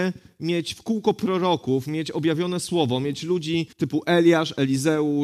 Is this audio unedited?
no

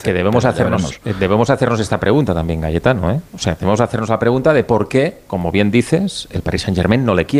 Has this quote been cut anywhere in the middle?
no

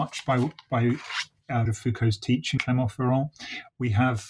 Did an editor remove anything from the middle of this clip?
yes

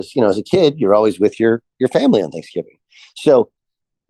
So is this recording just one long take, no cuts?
yes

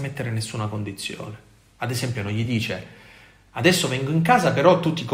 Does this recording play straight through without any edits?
yes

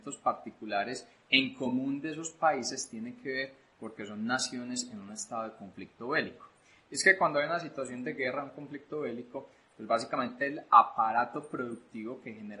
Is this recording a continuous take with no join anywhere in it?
yes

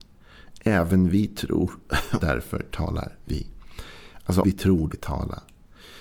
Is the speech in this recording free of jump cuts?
no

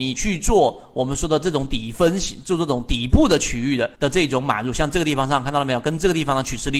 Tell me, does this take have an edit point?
yes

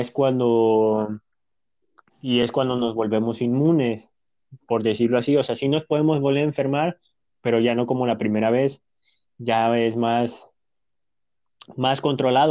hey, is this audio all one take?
yes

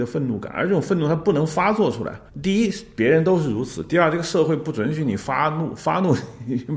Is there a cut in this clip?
yes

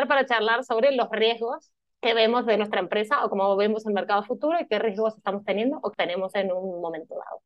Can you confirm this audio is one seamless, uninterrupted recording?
no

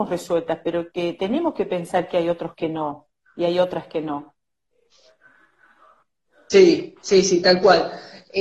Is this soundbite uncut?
yes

